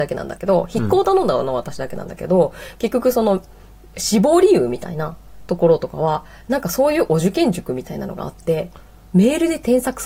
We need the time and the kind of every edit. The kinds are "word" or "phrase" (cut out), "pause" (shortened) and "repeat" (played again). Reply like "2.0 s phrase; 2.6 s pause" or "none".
none